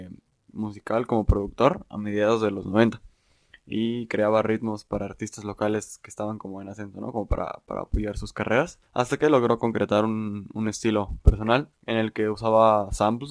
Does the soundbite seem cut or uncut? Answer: cut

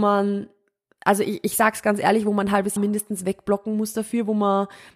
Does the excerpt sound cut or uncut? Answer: cut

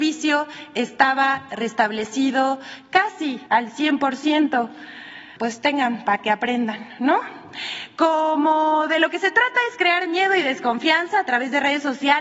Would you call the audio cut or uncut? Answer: uncut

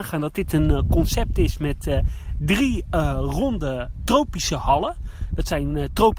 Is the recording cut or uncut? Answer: uncut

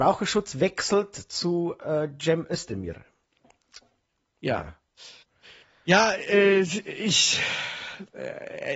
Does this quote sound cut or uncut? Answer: uncut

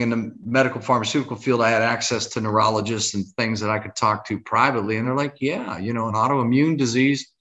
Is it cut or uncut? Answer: uncut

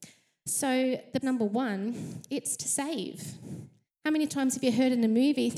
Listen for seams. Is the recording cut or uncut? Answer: cut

